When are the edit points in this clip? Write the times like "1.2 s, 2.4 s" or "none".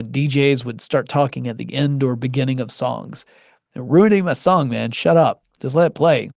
none